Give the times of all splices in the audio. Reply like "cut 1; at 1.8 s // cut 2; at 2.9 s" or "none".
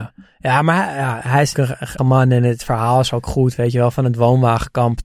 cut 1; at 1.5 s // cut 2; at 2.0 s